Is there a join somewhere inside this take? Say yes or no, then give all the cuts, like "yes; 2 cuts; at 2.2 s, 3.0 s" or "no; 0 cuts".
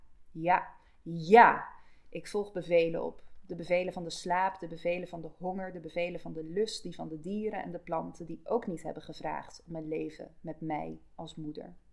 no; 0 cuts